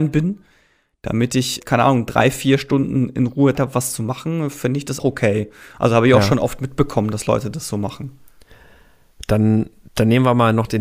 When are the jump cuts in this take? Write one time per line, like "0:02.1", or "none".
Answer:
0:01.6
0:03.5
0:05.0